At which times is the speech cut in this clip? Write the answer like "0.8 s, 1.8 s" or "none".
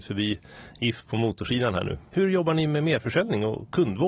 none